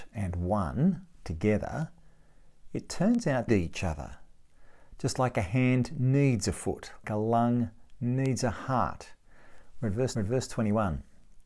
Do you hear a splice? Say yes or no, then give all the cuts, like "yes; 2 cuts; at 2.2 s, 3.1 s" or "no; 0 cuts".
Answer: yes; 3 cuts; at 3.5 s, 7.0 s, 10.1 s